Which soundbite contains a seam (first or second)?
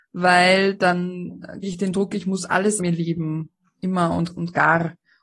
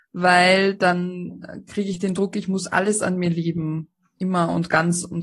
first